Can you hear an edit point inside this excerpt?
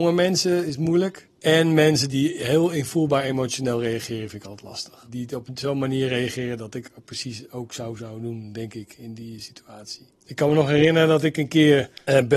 yes; 1 cut; at 10.1 s

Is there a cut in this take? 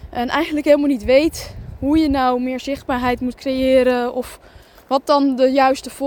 no; 0 cuts

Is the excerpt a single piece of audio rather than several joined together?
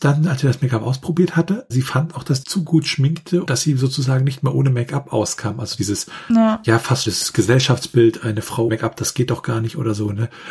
no; 6 cuts; at 1.7 s, 2.4 s, 3.5 s, 5.8 s, 7.1 s, 8.7 s

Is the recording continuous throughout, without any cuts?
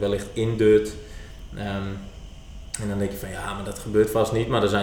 yes; 0 cuts

